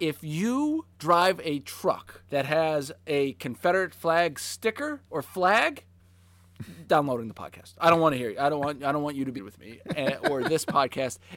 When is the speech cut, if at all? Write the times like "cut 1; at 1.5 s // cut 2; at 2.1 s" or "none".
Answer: cut 1; at 0.9 s // cut 2; at 2.3 s // cut 3; at 5.1 s // cut 4; at 6.9 s // cut 5; at 9.4 s